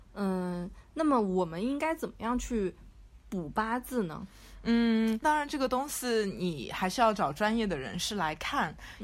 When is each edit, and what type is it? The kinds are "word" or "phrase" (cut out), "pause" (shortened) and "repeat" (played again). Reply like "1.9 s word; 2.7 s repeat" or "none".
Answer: 5.2 s phrase

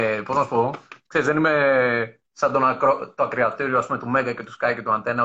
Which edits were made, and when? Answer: none

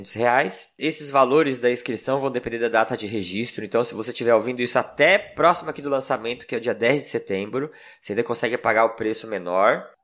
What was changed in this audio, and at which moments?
none

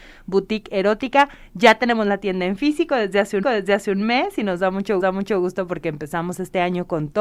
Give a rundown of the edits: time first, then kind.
3.4 s repeat; 5.0 s repeat

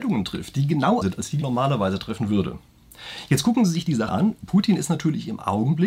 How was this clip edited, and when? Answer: 1.0 s word; 1.4 s word; 4.1 s word

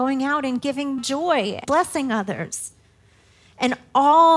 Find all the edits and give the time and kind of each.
1.0 s word; 1.6 s word

